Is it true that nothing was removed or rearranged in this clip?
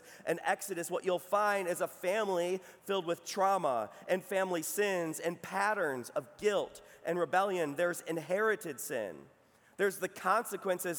yes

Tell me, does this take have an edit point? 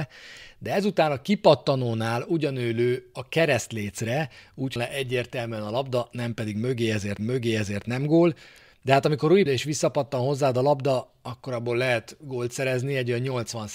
yes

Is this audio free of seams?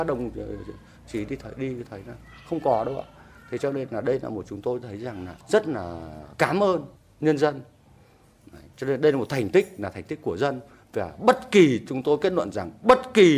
no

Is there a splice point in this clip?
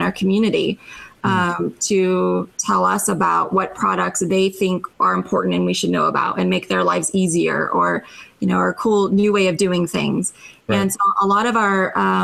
yes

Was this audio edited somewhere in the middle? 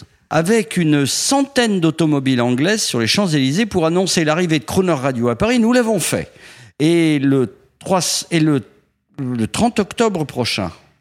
no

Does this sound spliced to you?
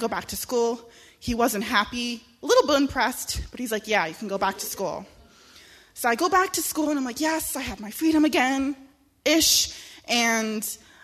no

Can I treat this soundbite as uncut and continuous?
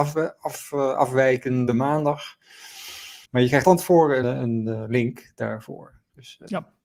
no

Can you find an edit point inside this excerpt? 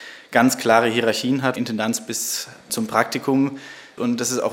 yes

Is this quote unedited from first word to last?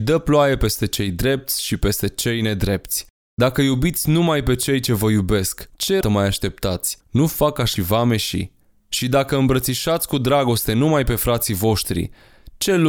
no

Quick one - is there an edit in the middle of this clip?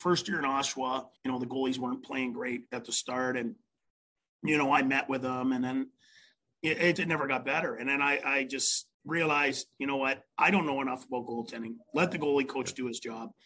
yes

